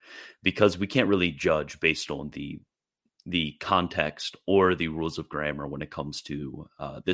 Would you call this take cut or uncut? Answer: uncut